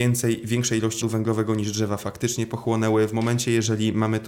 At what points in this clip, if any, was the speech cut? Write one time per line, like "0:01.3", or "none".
0:01.0